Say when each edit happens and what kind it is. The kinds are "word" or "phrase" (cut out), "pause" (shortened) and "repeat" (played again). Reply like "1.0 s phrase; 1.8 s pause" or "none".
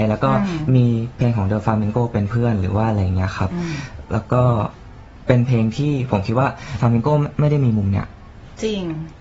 6.8 s word